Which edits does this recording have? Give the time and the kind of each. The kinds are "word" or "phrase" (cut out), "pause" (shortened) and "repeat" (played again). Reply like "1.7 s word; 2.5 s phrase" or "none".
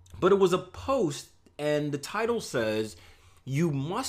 none